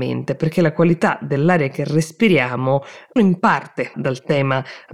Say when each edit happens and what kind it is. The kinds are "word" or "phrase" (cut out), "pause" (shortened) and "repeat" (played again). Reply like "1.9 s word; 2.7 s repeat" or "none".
3.2 s word; 3.9 s word